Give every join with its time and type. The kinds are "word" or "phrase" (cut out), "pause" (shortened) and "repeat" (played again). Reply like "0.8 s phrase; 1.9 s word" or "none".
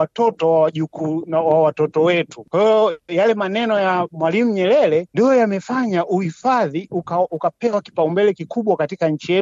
7.3 s word